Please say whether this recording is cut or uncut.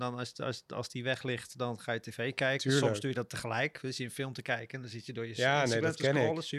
uncut